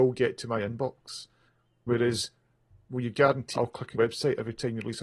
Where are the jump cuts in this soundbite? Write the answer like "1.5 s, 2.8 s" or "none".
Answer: 3.5 s, 3.9 s